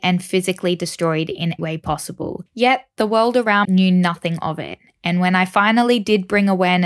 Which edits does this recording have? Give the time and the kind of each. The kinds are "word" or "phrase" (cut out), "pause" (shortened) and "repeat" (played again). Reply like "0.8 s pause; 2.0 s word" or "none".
1.6 s word; 2.5 s pause; 3.6 s word